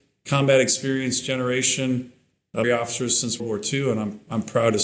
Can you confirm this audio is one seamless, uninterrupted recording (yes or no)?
no